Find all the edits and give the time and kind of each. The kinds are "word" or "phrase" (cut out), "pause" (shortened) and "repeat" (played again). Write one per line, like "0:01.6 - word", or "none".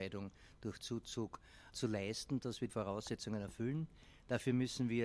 0:01.7 - word
0:02.7 - word